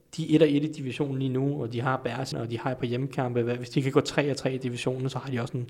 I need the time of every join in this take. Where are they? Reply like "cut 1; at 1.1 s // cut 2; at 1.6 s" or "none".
cut 1; at 2.3 s